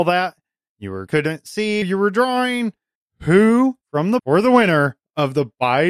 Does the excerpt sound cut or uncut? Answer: cut